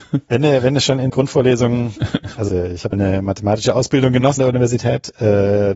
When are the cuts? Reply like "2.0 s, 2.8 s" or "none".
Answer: 1.1 s, 2.5 s, 2.9 s, 4.4 s